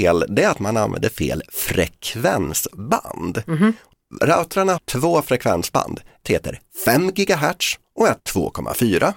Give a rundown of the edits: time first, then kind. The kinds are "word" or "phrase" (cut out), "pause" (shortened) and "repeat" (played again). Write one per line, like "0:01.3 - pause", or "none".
0:04.8 - word
0:06.2 - word
0:08.2 - word